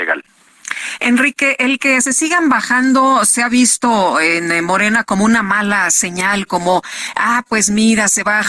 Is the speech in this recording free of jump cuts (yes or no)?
yes